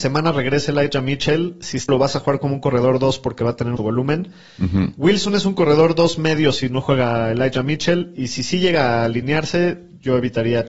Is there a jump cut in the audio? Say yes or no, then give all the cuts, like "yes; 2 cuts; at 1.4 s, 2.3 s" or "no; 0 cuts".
yes; 2 cuts; at 1.9 s, 3.8 s